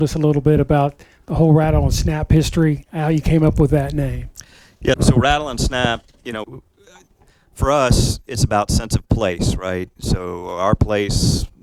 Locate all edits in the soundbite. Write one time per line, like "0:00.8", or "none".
0:04.9
0:06.4

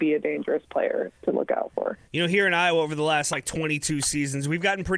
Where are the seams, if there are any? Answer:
0:02.0

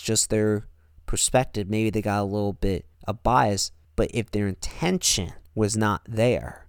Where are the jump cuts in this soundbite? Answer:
0:02.9
0:03.8
0:05.5

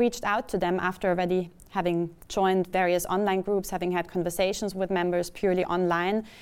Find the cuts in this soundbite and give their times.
none

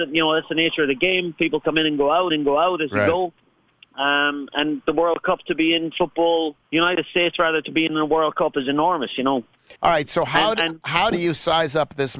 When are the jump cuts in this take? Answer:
0:02.3
0:06.6
0:09.8
0:11.1

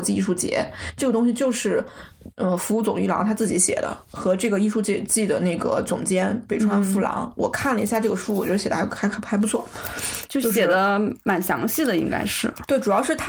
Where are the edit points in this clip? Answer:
0:04.1

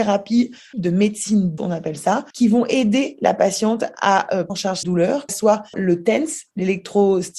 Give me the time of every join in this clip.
0:01.6
0:02.3
0:04.5
0:04.8
0:05.3
0:05.7

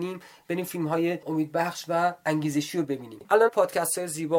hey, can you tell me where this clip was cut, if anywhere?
0:03.5

